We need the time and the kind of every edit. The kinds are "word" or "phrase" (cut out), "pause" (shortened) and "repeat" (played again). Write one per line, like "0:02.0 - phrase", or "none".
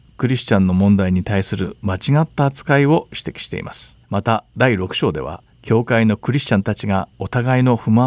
0:04.0 - pause
0:05.5 - pause
0:07.1 - pause